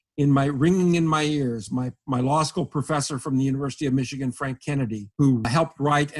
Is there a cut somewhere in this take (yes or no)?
no